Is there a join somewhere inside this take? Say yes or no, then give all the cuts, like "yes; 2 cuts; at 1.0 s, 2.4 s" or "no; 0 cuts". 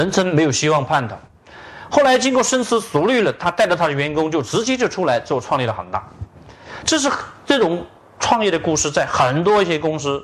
no; 0 cuts